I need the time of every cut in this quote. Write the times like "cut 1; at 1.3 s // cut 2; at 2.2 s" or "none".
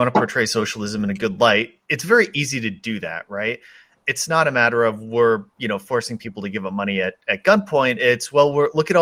none